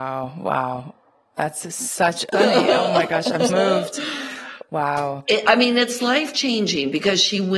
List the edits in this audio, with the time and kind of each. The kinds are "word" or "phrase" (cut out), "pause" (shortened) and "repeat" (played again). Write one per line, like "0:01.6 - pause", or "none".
0:02.3 - phrase
0:03.5 - word

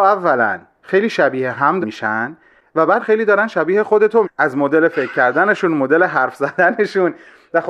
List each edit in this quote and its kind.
0:01.8 - word
0:03.0 - word
0:04.2 - word

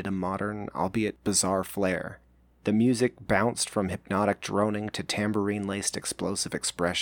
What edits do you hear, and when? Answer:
none

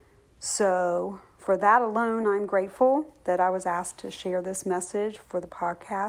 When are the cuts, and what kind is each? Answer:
none

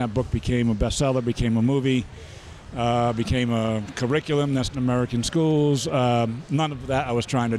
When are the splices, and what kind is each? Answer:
0:04.7 - word

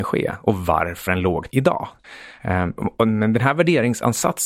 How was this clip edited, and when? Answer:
0:01.1 - word
0:01.5 - word
0:03.0 - word

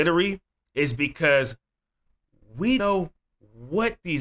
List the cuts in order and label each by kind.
0:02.8 - word

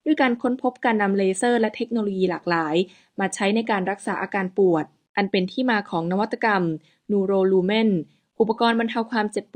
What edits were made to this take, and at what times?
none

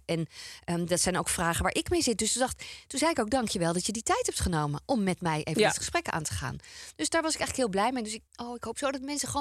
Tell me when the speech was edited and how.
0:08.3 - pause

